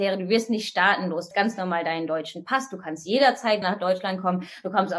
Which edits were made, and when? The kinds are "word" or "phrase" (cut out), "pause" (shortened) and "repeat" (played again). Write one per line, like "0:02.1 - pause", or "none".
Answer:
0:01.3 - word
0:03.6 - word